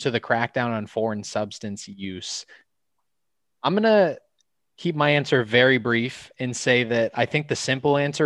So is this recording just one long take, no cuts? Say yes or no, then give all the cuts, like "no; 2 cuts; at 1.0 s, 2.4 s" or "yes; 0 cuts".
yes; 0 cuts